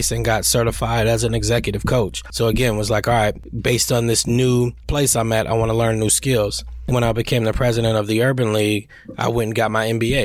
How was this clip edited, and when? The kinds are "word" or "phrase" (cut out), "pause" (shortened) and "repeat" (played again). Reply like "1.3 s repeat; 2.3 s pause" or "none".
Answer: 6.9 s word